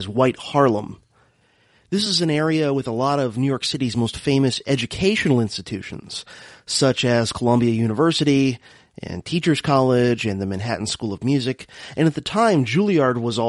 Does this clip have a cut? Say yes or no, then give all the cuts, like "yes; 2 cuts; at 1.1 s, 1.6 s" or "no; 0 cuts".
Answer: no; 0 cuts